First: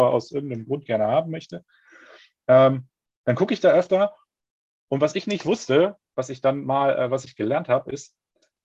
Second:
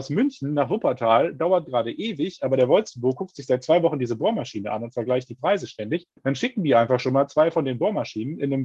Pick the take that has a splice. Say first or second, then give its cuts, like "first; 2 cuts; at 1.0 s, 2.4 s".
second; 1 cut; at 6.2 s